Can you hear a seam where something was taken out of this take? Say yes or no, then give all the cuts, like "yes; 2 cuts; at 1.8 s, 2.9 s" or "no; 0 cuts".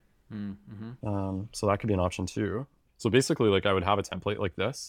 no; 0 cuts